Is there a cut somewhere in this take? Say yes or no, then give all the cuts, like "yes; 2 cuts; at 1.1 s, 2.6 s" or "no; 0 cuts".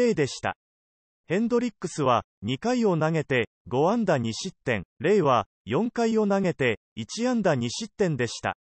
yes; 1 cut; at 4.9 s